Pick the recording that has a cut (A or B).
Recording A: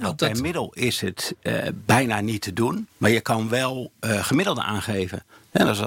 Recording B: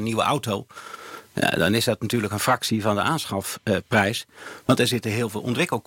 A